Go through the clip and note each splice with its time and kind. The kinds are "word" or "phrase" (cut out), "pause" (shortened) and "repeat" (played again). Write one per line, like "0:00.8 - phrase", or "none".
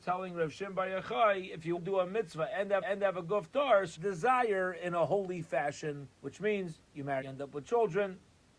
0:01.8 - word
0:02.8 - repeat
0:04.0 - phrase
0:06.1 - pause
0:06.8 - pause
0:07.2 - phrase